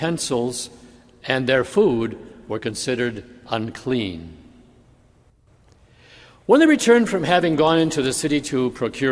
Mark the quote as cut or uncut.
uncut